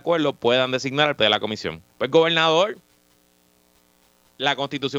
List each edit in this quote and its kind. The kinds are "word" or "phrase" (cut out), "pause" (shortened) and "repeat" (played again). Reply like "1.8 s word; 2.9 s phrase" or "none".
1.2 s word; 1.9 s pause